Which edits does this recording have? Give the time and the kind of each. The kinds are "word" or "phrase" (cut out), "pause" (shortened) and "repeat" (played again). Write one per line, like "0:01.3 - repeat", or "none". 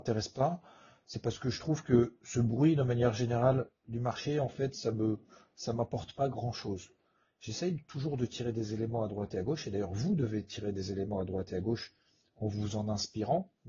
none